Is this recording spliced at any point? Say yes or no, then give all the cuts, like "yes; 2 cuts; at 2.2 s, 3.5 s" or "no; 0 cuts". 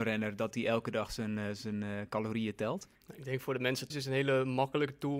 yes; 2 cuts; at 3.0 s, 3.9 s